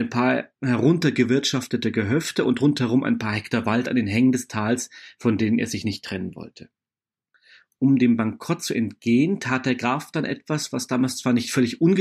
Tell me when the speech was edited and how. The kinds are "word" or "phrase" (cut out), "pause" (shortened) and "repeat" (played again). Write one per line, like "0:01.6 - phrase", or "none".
none